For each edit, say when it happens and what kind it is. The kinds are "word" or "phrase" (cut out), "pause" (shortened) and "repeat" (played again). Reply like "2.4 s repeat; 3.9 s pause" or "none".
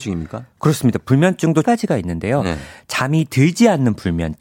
1.6 s phrase